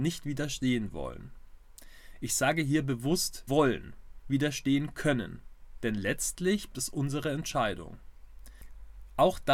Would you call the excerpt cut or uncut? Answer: cut